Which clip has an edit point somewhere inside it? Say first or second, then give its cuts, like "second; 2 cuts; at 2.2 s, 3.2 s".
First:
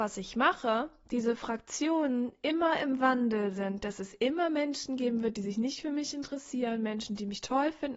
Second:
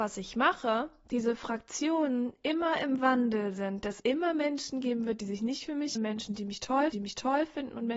second; 3 cuts; at 4.0 s, 6.0 s, 6.9 s